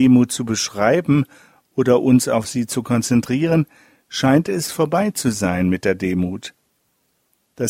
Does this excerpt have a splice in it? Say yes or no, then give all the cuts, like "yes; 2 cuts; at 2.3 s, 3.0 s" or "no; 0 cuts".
no; 0 cuts